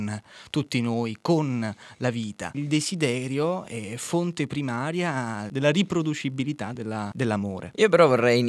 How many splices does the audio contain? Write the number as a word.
zero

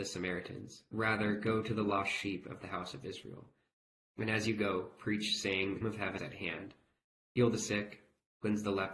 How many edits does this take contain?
three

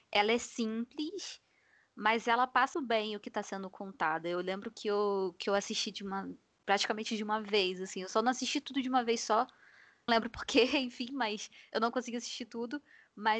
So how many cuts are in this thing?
two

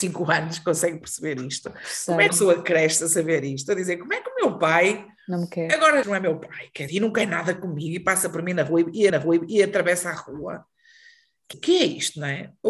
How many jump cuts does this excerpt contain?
five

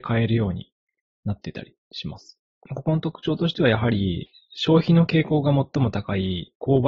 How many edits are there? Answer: one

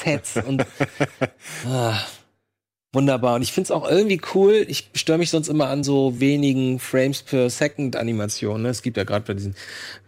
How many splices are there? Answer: zero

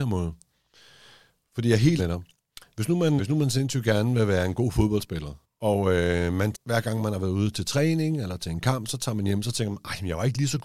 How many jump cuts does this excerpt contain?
three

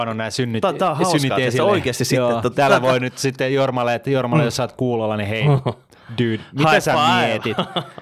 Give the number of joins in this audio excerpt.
zero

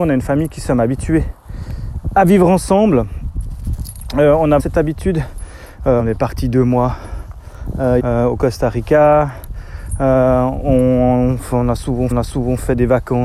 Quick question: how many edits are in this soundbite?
four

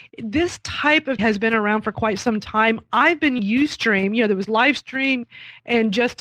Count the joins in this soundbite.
three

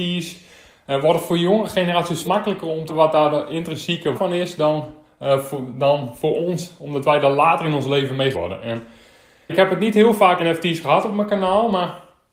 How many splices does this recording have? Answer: six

